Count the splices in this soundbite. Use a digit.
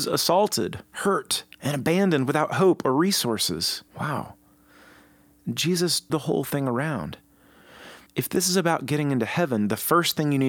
4